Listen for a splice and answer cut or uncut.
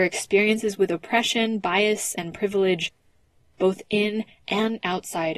uncut